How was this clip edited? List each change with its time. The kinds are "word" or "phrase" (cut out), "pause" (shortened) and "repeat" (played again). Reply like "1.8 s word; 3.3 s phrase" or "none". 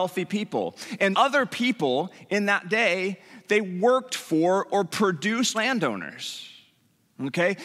1.1 s word; 5.5 s phrase